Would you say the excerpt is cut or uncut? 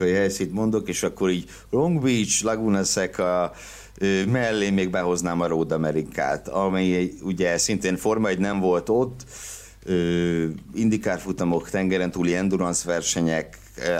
uncut